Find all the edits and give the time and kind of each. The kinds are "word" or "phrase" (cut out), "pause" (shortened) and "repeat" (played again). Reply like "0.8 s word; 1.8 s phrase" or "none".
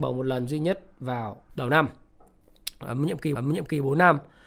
1.5 s pause; 3.4 s repeat